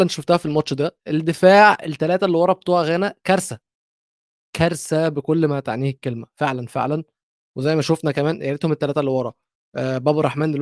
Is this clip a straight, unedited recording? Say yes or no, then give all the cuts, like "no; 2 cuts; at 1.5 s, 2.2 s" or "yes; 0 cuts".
yes; 0 cuts